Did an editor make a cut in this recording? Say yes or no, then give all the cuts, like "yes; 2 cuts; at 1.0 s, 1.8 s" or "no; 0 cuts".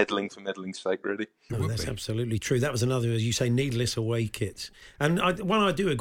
no; 0 cuts